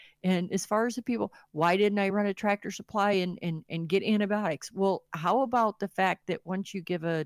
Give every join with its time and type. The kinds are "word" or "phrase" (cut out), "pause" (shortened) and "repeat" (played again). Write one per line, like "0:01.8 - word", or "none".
none